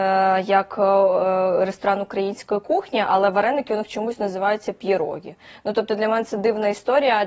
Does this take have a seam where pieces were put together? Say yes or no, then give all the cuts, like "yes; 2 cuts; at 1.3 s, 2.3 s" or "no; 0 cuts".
no; 0 cuts